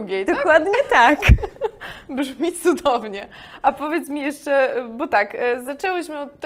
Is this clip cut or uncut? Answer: uncut